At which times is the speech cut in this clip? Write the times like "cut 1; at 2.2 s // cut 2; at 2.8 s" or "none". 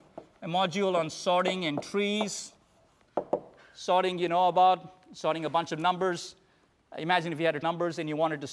cut 1; at 7.6 s